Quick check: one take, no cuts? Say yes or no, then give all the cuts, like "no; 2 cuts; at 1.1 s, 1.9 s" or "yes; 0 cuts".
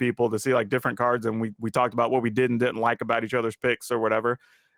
yes; 0 cuts